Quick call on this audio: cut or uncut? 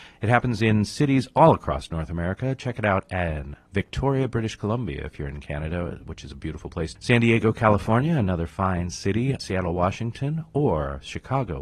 cut